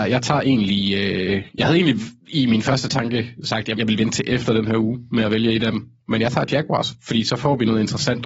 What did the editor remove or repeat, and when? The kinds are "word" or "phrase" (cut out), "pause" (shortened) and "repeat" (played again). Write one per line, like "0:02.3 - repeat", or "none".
0:02.2 - pause
0:03.7 - word